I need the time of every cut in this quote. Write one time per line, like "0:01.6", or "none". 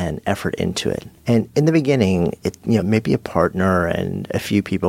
0:01.2
0:02.8